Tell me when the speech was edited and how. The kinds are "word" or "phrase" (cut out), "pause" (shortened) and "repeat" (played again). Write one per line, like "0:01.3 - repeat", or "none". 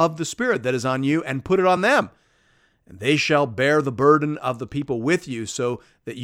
none